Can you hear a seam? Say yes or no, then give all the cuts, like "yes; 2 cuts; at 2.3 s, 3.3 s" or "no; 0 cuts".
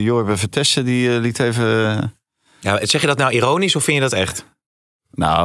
no; 0 cuts